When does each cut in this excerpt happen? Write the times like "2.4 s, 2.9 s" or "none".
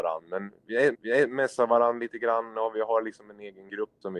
0.9 s